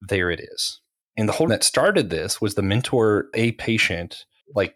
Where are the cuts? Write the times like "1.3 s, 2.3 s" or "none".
1.5 s, 3.3 s